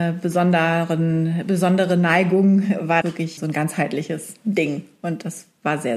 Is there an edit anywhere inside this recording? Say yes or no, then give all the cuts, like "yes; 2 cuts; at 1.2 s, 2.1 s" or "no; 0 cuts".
yes; 2 cuts; at 3.0 s, 3.4 s